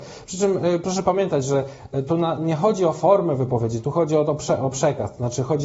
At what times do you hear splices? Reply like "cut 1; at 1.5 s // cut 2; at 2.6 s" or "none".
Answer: none